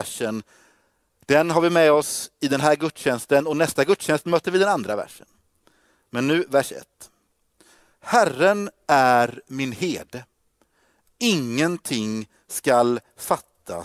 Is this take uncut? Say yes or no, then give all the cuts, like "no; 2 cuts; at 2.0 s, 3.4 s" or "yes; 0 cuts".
yes; 0 cuts